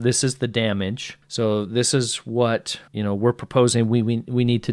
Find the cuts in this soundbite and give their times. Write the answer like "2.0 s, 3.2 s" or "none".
2.9 s

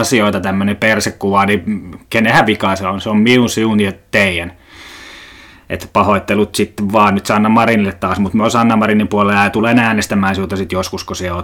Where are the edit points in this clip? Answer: none

